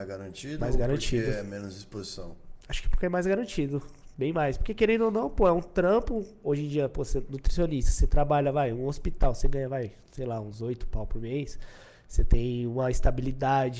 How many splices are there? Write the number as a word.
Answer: zero